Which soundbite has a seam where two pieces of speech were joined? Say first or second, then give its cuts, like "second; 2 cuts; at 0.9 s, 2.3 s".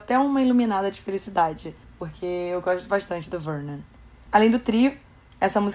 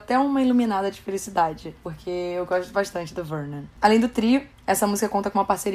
second; 3 cuts; at 1.8 s, 3.7 s, 4.5 s